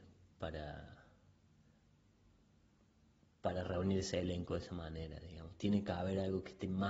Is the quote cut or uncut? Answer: uncut